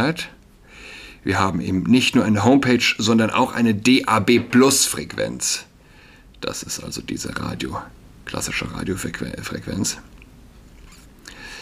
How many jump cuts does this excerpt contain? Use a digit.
0